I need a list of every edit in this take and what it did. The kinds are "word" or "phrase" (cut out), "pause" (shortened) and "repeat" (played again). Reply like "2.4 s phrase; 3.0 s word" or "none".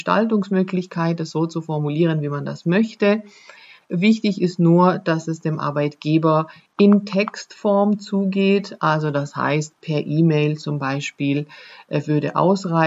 none